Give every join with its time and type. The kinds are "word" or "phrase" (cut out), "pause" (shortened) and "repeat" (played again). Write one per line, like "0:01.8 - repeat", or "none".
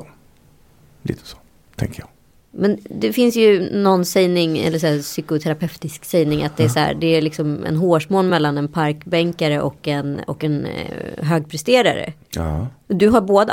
none